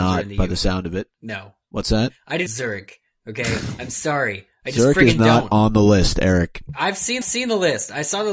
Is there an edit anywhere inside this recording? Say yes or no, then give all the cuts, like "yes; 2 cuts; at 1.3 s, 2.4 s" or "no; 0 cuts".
yes; 2 cuts; at 2.5 s, 7.2 s